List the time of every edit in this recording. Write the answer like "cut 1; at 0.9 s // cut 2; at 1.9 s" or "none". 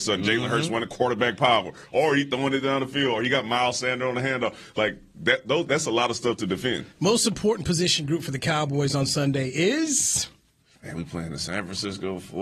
cut 1; at 6.9 s // cut 2; at 10.6 s